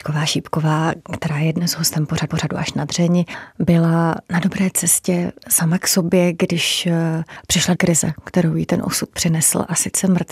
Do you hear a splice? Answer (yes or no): yes